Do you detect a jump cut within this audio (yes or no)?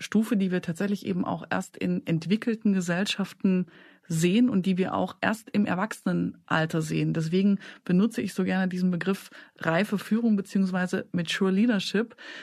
no